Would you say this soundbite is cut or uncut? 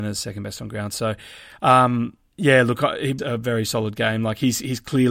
cut